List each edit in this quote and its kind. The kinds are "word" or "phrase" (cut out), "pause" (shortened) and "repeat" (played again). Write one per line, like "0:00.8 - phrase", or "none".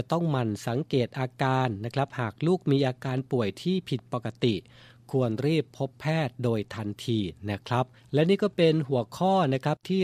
0:08.0 - pause